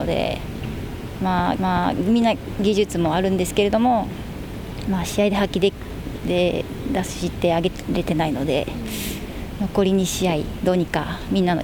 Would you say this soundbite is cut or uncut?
cut